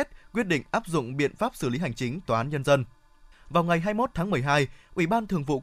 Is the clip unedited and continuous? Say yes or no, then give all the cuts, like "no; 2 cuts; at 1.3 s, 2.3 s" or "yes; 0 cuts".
no; 2 cuts; at 2.3 s, 3.3 s